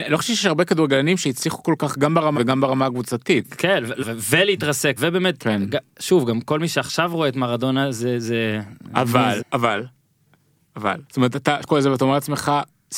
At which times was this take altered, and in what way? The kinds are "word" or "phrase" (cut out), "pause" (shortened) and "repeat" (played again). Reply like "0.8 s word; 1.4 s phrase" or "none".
2.3 s word; 4.0 s word; 5.0 s word; 9.4 s word; 11.1 s pause; 11.6 s word